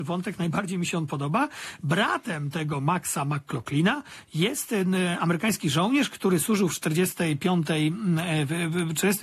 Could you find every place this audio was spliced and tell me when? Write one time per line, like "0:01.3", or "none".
none